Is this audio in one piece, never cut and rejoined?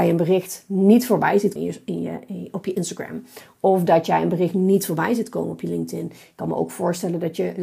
no; 1 cut; at 1.6 s

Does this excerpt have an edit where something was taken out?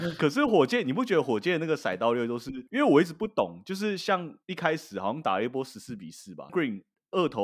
yes; 3 cuts; at 2.7 s, 4.4 s, 6.5 s

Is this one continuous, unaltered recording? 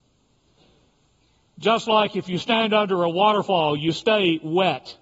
yes; 0 cuts

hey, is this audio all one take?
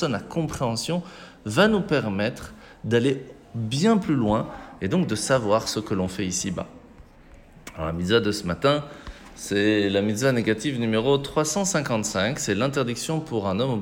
yes; 0 cuts

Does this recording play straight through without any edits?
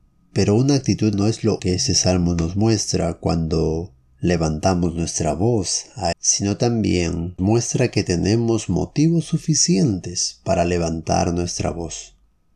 no; 4 cuts; at 1.1 s, 1.6 s, 6.1 s, 7.4 s

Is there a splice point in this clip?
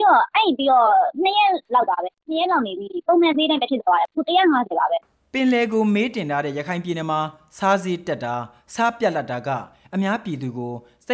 yes; 1 cut; at 5.0 s

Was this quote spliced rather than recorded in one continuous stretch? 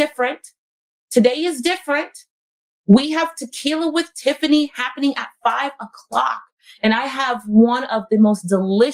no; 0 cuts

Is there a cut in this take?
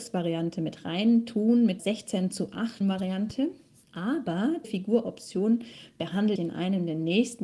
yes; 4 cuts; at 1.8 s, 2.8 s, 4.6 s, 6.4 s

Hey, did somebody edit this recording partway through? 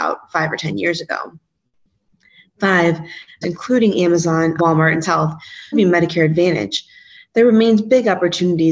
yes; 4 cuts; at 3.4 s, 4.6 s, 5.0 s, 5.7 s

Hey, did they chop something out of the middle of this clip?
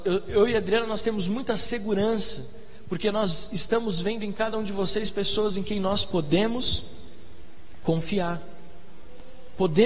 no; 0 cuts

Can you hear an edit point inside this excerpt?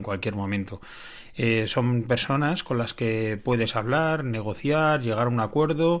no; 0 cuts

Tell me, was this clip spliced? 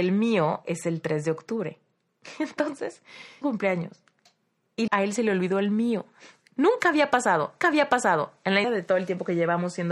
yes; 4 cuts; at 3.4 s, 4.9 s, 7.6 s, 8.6 s

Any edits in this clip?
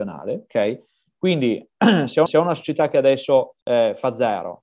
yes; 2 cuts; at 2.3 s, 3.6 s

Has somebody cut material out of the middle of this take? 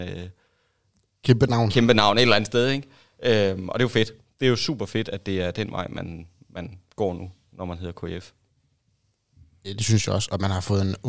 no; 0 cuts

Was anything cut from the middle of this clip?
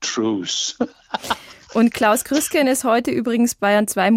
no; 0 cuts

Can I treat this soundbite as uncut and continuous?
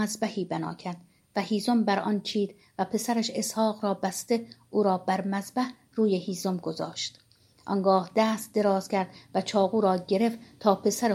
yes; 0 cuts

